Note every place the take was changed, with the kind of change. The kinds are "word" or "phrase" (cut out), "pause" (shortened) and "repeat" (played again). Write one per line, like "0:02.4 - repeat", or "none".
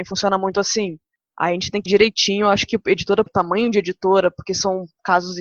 0:01.9 - word
0:03.3 - phrase